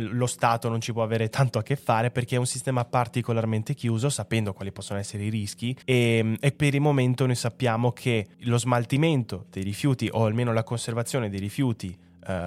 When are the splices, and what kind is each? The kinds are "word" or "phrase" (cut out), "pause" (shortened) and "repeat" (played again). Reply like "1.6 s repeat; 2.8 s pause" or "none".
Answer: 5.8 s pause; 6.5 s word; 8.3 s pause